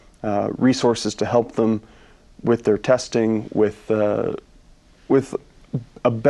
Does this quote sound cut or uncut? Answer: uncut